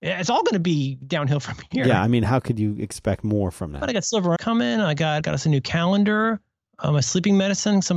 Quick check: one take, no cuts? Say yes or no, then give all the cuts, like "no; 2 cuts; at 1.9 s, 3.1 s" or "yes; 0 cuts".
no; 2 cuts; at 4.4 s, 5.2 s